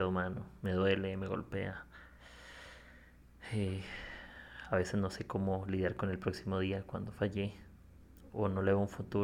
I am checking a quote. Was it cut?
no; 0 cuts

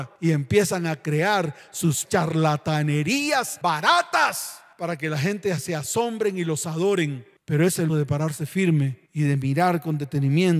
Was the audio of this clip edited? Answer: yes; 2 cuts; at 2.0 s, 7.9 s

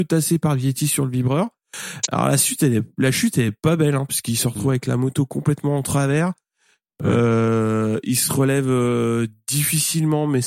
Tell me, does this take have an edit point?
no; 0 cuts

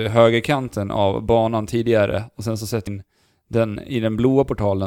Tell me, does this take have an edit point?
yes; 1 cut; at 2.9 s

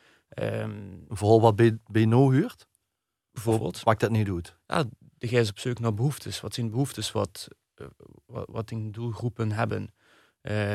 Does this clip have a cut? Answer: no; 0 cuts

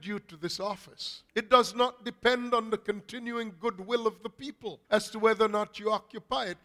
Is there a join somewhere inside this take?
yes; 2 cuts; at 1.3 s, 4.8 s

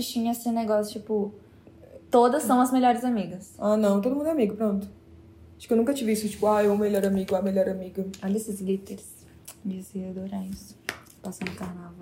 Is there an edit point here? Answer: no; 0 cuts

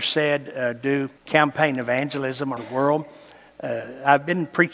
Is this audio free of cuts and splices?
no; 2 cuts; at 1.2 s, 2.6 s

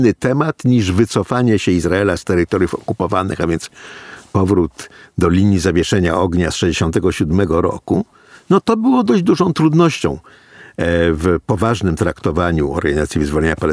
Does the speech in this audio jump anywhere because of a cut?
no; 0 cuts

